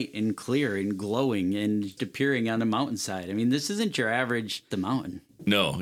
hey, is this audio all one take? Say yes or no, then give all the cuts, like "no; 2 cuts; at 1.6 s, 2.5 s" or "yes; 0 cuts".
no; 2 cuts; at 2.0 s, 4.7 s